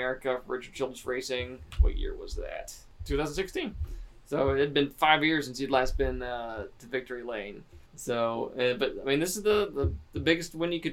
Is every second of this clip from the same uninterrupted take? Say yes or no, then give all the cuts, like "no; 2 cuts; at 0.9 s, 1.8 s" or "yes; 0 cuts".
no; 1 cut; at 7.9 s